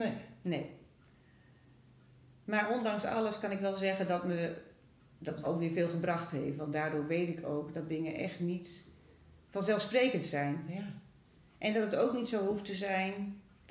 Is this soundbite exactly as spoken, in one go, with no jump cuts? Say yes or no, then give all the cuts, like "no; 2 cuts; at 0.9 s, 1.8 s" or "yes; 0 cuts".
no; 2 cuts; at 5.4 s, 9.4 s